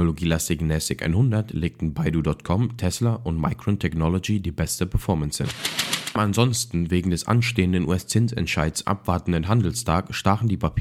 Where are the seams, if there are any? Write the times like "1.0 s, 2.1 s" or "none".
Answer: 6.2 s